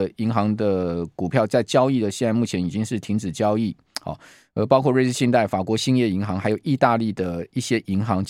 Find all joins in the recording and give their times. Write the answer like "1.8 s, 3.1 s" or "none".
none